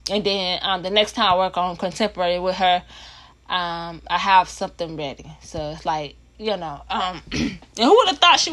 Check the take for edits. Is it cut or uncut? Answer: uncut